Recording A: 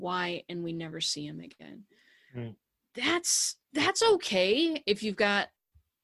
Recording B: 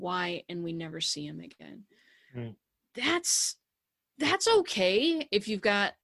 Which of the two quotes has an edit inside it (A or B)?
A